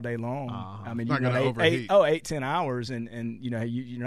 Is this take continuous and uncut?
yes; 0 cuts

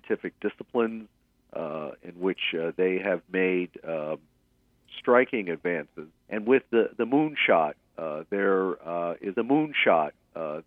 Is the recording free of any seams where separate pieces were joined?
no; 2 cuts; at 6.2 s, 9.4 s

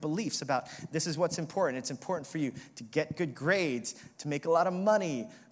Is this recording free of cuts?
yes; 0 cuts

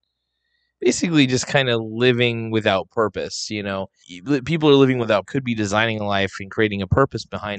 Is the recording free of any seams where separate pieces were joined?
no; 2 cuts; at 4.0 s, 5.2 s

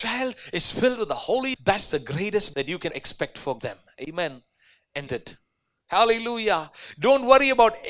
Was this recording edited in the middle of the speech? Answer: yes; 5 cuts; at 1.6 s, 2.5 s, 2.9 s, 3.6 s, 5.1 s

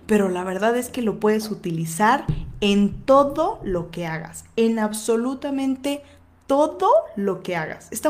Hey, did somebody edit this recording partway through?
no; 0 cuts

